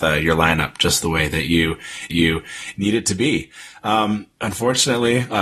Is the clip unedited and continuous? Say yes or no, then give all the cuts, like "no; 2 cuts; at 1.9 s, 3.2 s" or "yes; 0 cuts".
no; 2 cuts; at 2.1 s, 4.3 s